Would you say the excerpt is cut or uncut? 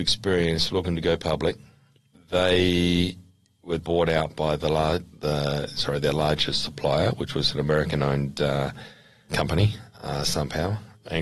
cut